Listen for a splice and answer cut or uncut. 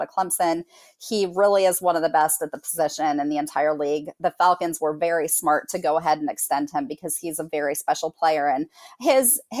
uncut